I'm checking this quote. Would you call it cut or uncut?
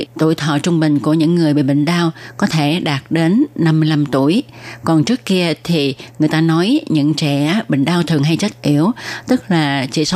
uncut